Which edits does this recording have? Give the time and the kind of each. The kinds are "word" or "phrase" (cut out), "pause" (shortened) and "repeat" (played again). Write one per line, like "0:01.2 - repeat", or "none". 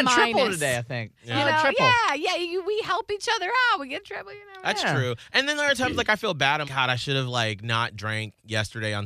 0:01.2 - pause
0:06.6 - word